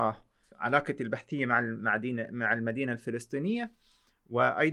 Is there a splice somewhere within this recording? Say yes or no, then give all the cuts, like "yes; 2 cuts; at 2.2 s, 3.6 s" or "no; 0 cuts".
no; 0 cuts